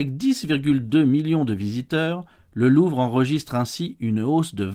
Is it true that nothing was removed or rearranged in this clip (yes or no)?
yes